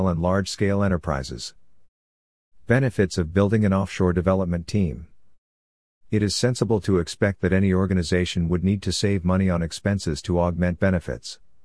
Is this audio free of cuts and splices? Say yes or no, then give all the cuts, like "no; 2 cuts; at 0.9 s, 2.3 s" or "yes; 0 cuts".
yes; 0 cuts